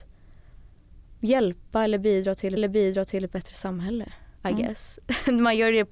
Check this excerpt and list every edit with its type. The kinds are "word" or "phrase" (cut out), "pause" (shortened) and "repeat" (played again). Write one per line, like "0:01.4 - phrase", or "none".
0:02.6 - repeat
0:04.4 - pause